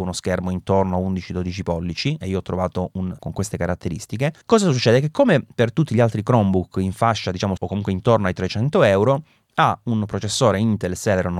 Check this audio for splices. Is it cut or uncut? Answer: cut